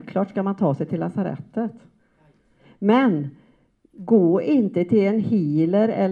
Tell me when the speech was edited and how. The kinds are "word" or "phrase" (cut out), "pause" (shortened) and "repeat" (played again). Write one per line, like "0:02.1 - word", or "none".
none